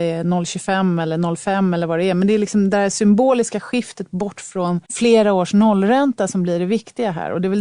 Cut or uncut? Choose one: cut